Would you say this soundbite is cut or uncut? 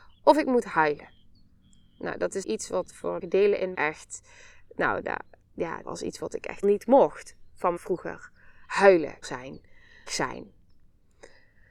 cut